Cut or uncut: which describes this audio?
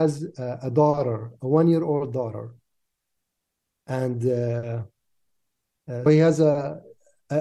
cut